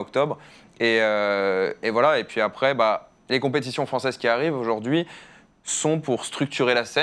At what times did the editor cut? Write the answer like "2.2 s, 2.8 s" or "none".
3.2 s